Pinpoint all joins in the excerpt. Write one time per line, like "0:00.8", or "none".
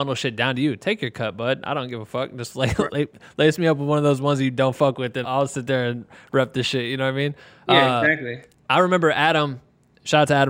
0:05.2